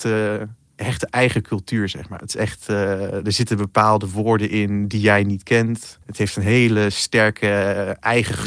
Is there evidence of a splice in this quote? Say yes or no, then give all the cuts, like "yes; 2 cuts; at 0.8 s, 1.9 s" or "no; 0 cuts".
yes; 1 cut; at 6.0 s